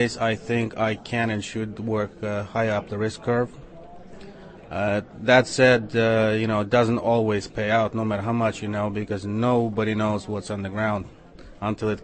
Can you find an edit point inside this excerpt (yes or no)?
no